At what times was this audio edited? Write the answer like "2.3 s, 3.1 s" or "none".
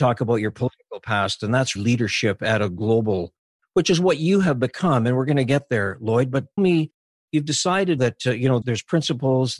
1.8 s, 6.6 s, 8.0 s, 8.6 s